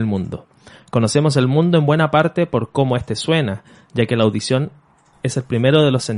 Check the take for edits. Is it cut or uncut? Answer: uncut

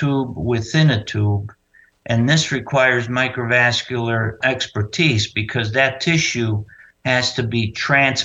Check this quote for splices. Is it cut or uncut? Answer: cut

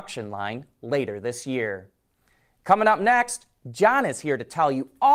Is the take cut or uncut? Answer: uncut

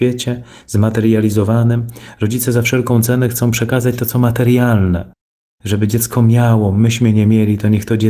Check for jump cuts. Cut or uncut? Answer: uncut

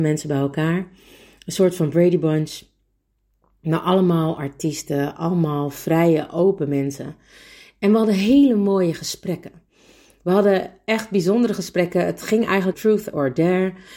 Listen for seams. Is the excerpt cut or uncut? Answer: cut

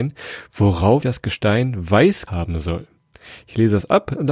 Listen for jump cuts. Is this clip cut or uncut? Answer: cut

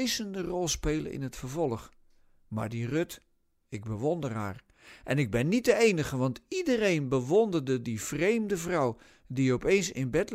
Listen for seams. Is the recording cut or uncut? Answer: uncut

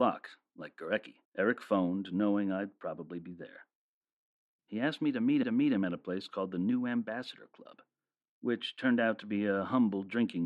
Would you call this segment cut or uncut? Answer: cut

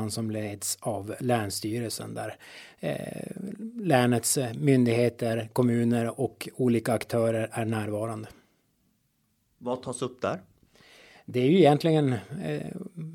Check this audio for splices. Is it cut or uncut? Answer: uncut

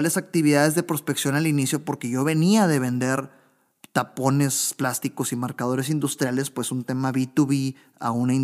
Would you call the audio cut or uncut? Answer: uncut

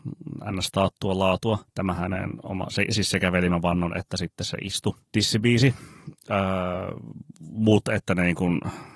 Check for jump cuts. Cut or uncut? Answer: cut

